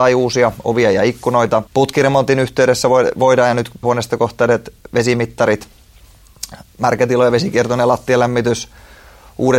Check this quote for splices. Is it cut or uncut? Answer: cut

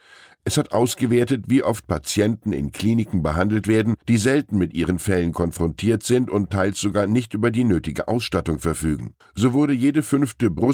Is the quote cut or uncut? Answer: cut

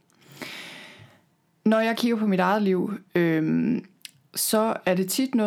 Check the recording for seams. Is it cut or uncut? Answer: uncut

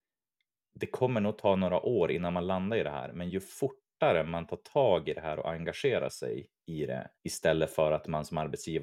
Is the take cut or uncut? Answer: cut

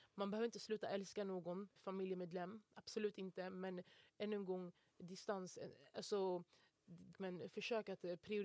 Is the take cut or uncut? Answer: cut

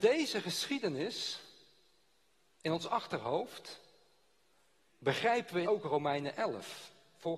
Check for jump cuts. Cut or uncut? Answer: cut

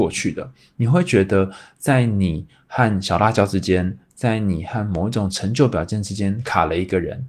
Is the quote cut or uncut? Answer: uncut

